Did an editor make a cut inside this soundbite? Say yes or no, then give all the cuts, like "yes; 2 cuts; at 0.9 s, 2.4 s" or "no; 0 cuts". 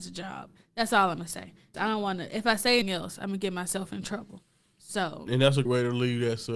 yes; 4 cuts; at 1.7 s, 2.8 s, 5.3 s, 5.7 s